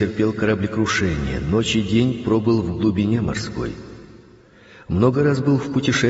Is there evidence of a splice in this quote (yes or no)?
no